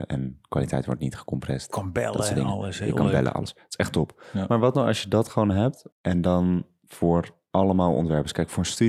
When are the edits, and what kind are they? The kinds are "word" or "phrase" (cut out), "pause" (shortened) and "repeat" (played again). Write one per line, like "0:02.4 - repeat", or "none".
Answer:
0:05.9 - pause